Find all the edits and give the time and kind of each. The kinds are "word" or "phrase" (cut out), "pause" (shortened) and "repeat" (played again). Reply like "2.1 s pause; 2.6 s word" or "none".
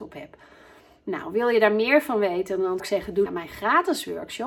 2.8 s word; 3.3 s phrase